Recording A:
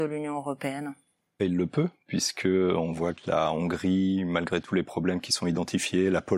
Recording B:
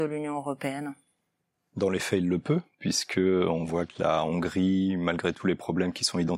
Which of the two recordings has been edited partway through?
A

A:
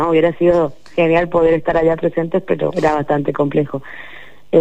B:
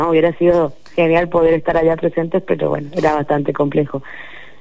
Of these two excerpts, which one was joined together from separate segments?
A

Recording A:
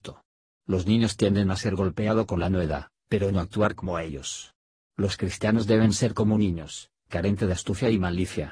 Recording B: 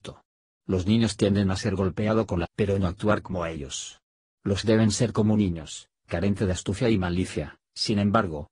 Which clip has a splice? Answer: B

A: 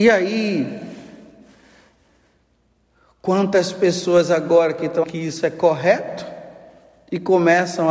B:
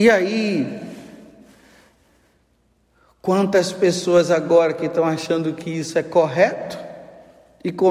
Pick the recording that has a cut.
A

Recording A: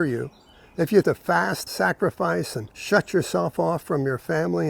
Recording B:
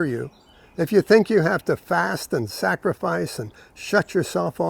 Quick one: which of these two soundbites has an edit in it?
A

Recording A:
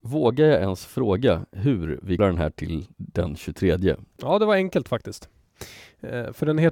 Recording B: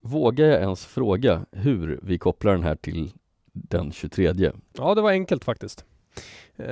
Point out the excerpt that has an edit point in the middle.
A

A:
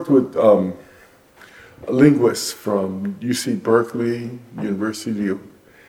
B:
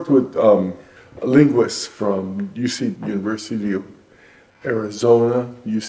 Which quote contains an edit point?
B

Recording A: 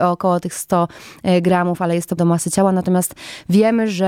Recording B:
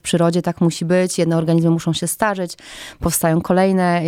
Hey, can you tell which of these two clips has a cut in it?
A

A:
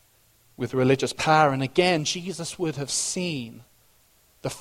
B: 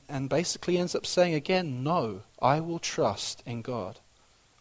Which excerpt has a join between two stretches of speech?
B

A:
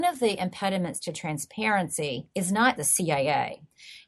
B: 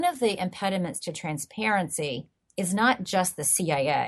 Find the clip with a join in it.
A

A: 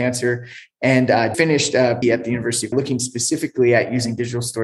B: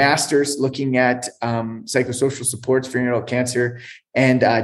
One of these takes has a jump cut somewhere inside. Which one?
A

